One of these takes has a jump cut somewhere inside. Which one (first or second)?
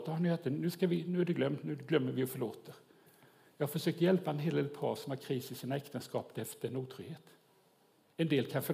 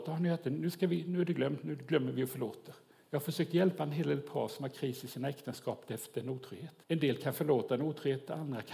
second